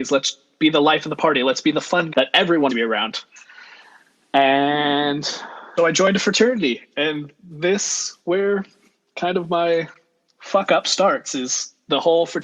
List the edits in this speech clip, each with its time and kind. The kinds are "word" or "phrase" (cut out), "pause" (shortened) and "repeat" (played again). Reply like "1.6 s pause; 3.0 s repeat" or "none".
2.1 s word; 2.7 s word; 5.8 s word